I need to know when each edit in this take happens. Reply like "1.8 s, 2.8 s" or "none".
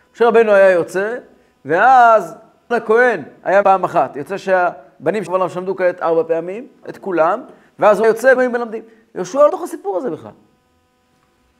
2.7 s, 3.6 s, 5.3 s, 6.8 s, 8.0 s, 8.4 s, 9.5 s